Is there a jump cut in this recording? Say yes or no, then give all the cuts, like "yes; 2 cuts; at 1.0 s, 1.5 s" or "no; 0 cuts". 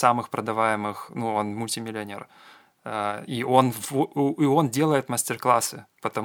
no; 0 cuts